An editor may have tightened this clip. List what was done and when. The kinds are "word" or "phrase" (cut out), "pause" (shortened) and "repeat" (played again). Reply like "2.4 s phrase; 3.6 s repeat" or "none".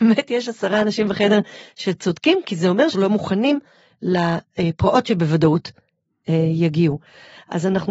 2.9 s word